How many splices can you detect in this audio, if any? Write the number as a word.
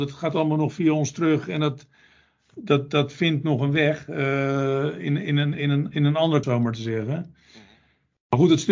two